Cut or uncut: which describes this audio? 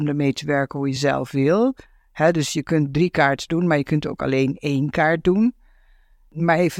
uncut